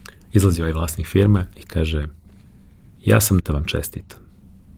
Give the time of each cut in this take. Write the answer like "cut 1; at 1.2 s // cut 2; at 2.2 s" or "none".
cut 1; at 1.5 s // cut 2; at 2.4 s // cut 3; at 3.4 s

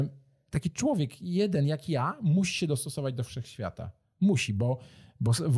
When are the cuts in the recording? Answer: none

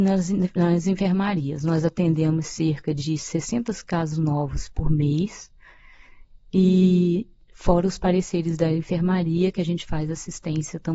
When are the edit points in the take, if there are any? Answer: none

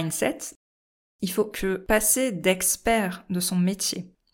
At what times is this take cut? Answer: cut 1; at 1.5 s

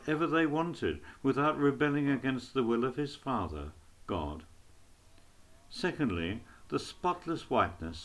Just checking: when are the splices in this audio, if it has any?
none

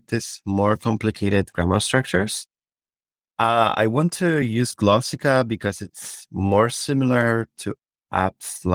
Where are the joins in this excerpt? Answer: none

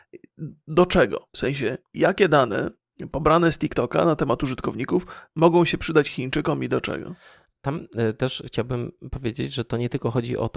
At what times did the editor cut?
none

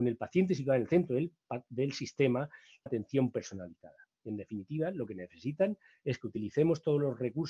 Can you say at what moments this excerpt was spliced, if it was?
cut 1; at 2.9 s

